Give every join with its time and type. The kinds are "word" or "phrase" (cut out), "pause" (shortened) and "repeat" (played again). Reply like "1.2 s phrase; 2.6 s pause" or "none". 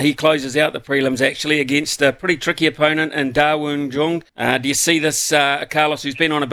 4.3 s pause